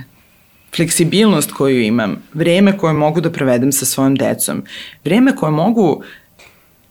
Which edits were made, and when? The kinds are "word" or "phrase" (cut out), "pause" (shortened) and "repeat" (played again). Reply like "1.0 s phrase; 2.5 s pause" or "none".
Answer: none